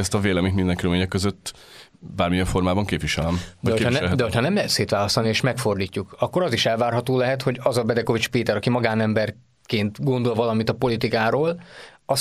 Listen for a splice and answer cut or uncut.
uncut